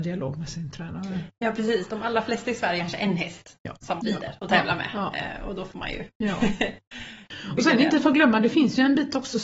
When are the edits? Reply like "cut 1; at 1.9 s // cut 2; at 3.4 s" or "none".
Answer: cut 1; at 2.8 s // cut 2; at 4.0 s